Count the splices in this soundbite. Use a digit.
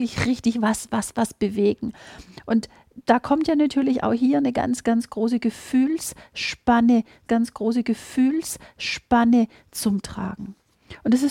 1